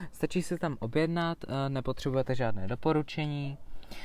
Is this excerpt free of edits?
yes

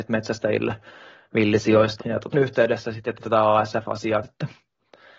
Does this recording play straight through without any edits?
no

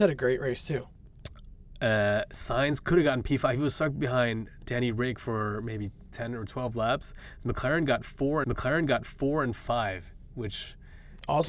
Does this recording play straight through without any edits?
no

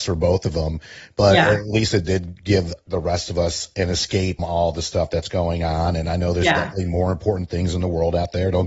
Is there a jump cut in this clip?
yes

